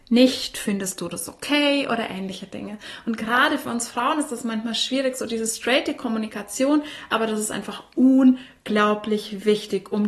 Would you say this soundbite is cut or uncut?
uncut